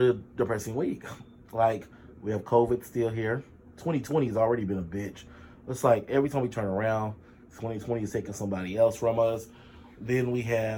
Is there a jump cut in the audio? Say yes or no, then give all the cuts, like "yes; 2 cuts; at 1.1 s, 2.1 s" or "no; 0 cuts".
no; 0 cuts